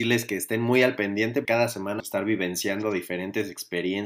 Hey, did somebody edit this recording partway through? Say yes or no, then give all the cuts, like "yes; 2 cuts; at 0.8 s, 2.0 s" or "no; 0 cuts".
yes; 2 cuts; at 1.4 s, 2.0 s